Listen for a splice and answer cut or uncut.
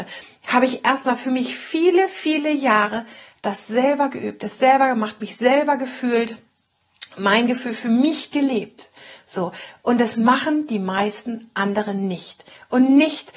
uncut